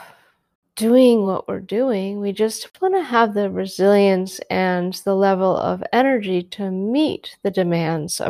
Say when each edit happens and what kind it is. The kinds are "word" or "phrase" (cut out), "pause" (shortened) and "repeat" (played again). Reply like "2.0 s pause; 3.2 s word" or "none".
none